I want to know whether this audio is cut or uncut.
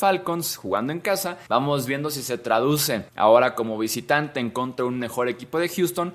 cut